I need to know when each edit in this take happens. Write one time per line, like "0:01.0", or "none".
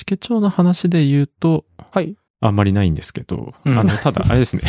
0:02.3